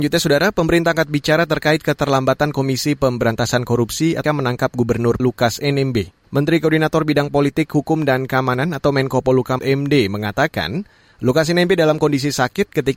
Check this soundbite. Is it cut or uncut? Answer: cut